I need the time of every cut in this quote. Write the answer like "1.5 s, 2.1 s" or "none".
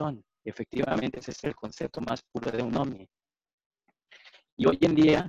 none